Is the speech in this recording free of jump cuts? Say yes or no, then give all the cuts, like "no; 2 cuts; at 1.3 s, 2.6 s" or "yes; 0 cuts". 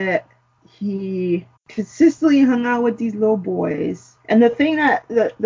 no; 2 cuts; at 1.6 s, 4.2 s